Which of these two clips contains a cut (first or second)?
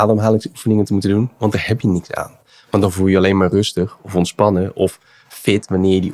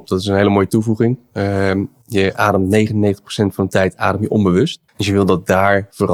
second